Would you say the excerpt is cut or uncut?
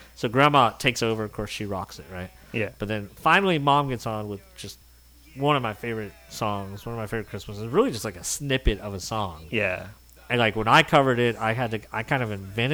uncut